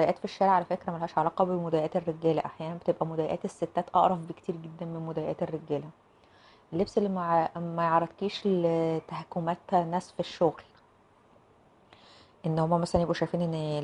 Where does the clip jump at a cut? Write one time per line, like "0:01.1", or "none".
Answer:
none